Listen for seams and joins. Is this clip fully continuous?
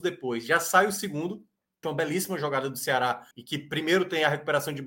no; 2 cuts; at 1.8 s, 3.3 s

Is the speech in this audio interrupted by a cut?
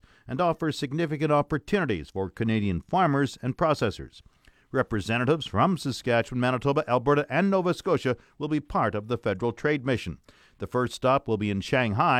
no; 0 cuts

